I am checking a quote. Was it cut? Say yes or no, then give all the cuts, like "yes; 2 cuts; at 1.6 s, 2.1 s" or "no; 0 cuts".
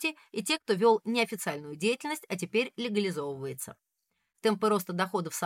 no; 0 cuts